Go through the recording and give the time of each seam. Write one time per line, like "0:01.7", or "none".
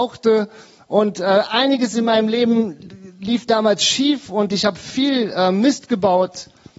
none